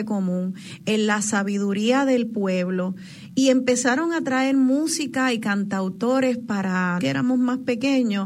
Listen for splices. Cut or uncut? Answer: cut